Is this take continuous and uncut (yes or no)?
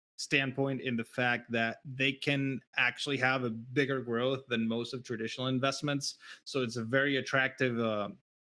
yes